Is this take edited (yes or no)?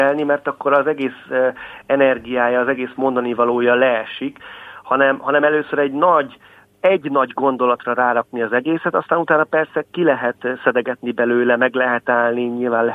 no